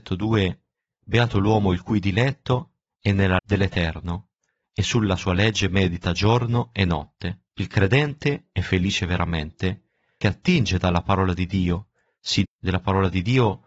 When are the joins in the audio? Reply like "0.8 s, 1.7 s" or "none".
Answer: 3.4 s, 7.5 s, 10.2 s, 12.4 s